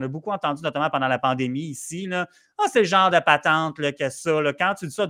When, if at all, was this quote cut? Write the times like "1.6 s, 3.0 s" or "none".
none